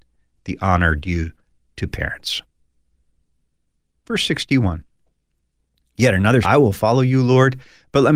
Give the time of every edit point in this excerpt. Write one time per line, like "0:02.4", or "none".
0:06.4

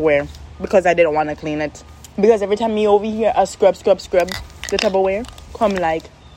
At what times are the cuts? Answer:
0:02.1

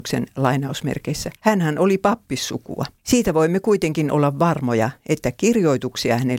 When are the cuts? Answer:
0:01.4
0:03.0

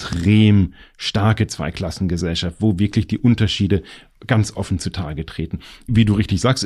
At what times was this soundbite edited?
none

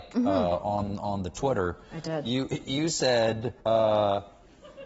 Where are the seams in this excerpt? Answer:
0:03.6

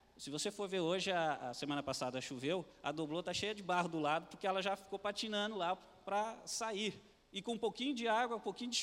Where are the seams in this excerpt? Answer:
0:02.7
0:07.1

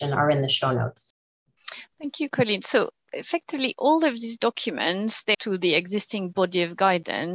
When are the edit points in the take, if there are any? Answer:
0:05.3

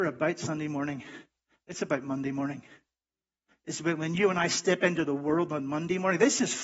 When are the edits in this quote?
none

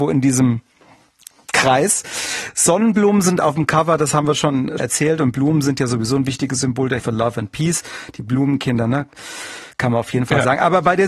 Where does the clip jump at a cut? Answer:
0:04.8
0:07.0

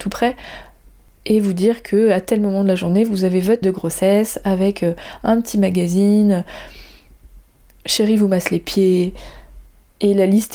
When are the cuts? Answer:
0:03.6

